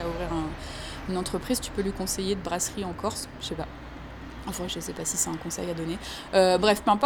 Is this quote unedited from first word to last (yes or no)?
yes